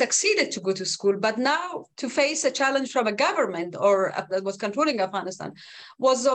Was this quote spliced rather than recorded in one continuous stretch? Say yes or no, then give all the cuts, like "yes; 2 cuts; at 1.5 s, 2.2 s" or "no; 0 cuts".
yes; 2 cuts; at 1.9 s, 4.3 s